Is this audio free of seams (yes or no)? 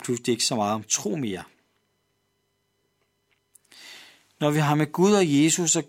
yes